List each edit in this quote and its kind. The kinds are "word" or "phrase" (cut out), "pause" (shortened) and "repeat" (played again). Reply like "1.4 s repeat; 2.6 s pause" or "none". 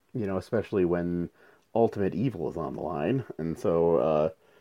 none